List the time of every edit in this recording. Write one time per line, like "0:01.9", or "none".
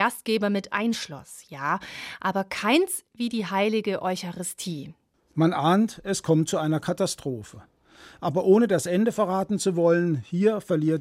none